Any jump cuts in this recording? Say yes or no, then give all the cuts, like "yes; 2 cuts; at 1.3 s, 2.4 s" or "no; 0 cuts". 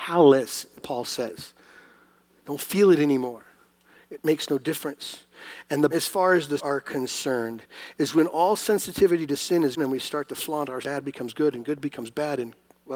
yes; 4 cuts; at 5.9 s, 6.6 s, 9.8 s, 10.8 s